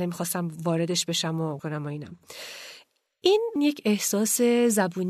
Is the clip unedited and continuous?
no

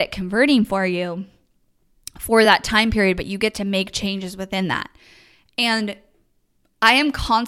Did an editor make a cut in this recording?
no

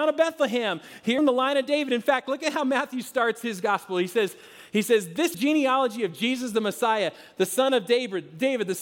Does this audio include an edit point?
yes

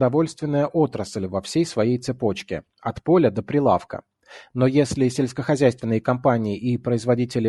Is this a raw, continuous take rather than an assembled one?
yes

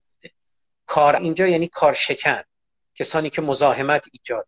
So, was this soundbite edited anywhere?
yes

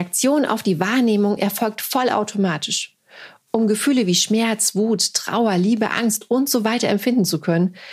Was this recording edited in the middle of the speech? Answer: no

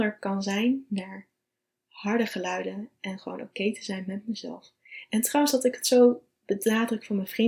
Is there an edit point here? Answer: no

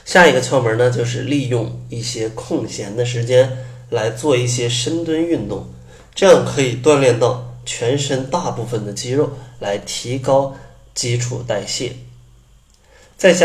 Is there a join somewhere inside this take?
no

